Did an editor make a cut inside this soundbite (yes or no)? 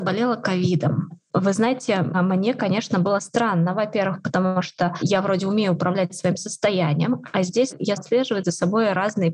yes